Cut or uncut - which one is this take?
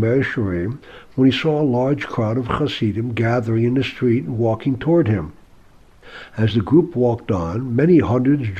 uncut